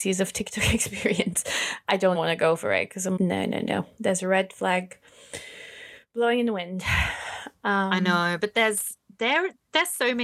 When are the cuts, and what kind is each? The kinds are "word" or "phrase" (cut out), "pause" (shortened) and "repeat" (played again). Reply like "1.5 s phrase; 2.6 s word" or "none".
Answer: 2.1 s word; 3.2 s word